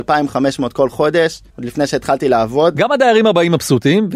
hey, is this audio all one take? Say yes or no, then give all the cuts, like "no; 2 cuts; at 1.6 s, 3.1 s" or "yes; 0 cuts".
yes; 0 cuts